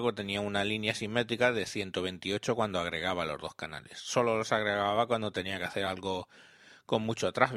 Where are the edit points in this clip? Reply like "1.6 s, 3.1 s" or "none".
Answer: none